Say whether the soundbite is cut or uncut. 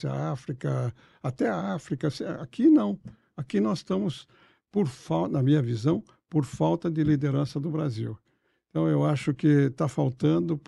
uncut